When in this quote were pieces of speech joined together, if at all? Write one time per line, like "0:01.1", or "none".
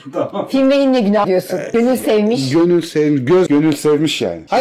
0:01.2
0:03.5